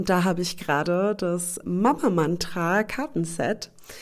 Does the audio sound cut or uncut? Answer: cut